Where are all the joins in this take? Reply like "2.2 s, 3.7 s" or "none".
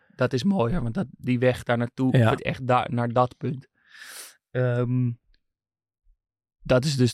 2.4 s